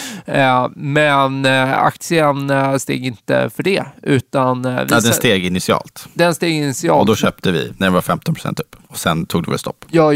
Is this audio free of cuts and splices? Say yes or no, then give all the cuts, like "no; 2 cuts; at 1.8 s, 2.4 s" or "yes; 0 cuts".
no; 1 cut; at 8.8 s